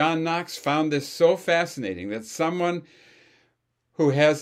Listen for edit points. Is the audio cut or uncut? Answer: uncut